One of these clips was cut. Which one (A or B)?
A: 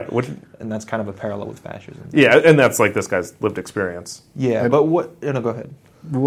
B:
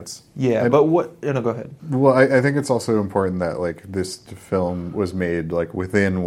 B